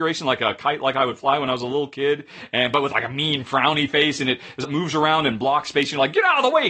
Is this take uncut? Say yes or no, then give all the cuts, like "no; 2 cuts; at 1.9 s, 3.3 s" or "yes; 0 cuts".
no; 1 cut; at 4.6 s